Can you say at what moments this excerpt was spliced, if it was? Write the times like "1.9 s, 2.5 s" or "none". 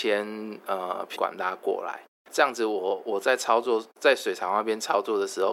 1.2 s, 2.3 s